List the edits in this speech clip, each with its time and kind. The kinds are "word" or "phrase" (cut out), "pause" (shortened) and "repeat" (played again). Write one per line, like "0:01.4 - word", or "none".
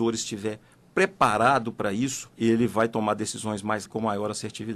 0:02.3 - pause
0:03.9 - word